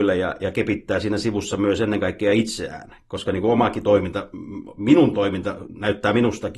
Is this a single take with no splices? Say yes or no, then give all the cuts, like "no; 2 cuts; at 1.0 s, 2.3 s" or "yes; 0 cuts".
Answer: yes; 0 cuts